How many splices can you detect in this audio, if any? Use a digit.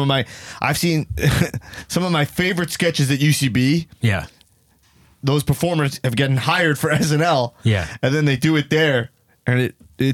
0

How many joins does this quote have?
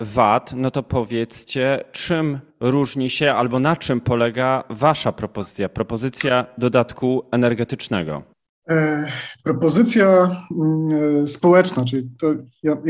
2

